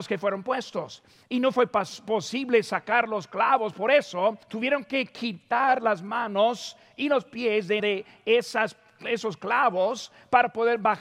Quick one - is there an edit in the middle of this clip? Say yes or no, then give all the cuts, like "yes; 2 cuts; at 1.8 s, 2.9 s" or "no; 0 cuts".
yes; 2 cuts; at 4.4 s, 7.8 s